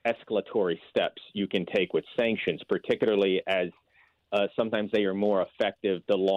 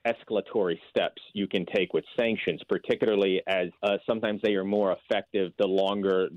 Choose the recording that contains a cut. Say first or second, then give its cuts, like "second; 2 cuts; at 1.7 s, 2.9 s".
second; 1 cut; at 3.7 s